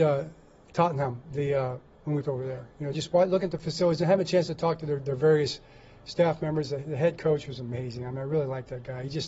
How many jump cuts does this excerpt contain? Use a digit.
1